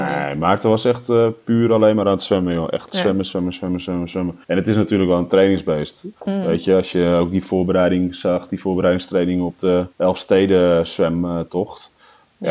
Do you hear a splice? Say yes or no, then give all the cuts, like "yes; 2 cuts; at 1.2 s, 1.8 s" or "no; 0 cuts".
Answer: yes; 3 cuts; at 4.4 s, 6.2 s, 9.9 s